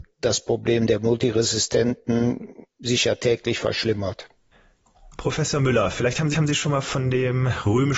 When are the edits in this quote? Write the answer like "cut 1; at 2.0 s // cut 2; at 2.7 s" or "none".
cut 1; at 6.3 s